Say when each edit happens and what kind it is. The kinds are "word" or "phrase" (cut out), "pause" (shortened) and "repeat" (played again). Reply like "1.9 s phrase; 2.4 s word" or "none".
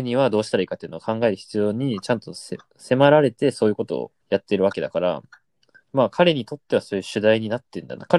4.2 s pause; 5.8 s pause